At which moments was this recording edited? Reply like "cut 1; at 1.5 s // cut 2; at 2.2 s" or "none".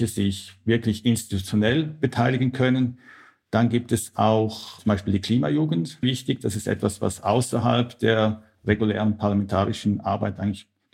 cut 1; at 6.0 s